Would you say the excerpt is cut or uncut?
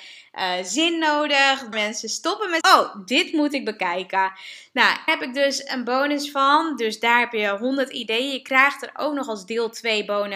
cut